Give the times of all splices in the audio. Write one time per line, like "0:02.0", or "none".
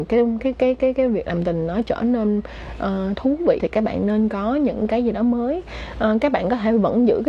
0:03.6